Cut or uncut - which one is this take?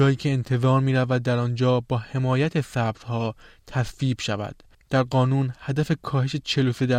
cut